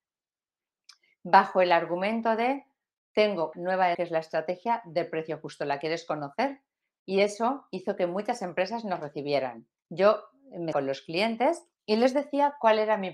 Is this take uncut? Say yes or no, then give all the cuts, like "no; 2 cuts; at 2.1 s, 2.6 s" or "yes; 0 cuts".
no; 5 cuts; at 3.5 s, 3.9 s, 9.8 s, 10.7 s, 11.7 s